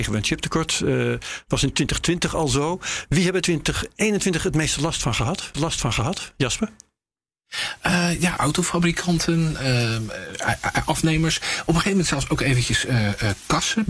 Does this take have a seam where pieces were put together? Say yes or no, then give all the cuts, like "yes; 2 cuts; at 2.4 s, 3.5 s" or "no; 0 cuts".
yes; 3 cuts; at 3.4 s, 5.5 s, 8.4 s